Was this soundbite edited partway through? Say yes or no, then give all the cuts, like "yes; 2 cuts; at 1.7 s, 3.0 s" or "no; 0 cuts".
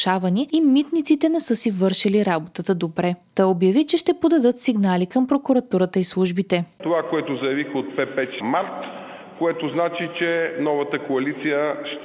yes; 1 cut; at 8.4 s